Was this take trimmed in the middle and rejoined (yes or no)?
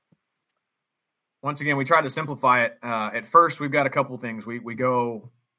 no